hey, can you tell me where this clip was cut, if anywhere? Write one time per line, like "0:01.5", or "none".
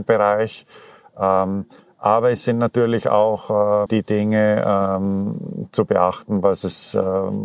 0:03.9

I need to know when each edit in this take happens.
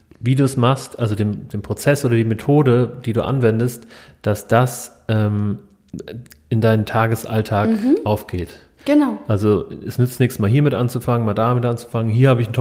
none

